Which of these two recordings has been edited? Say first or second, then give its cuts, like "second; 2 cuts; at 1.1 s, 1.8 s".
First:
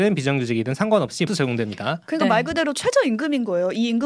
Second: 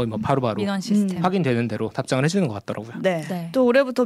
first; 1 cut; at 1.3 s